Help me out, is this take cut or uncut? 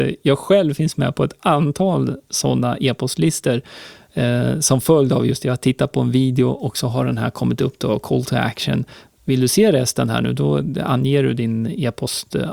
uncut